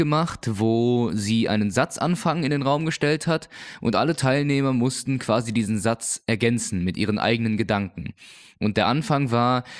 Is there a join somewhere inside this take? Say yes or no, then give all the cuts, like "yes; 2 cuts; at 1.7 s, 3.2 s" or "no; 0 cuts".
no; 0 cuts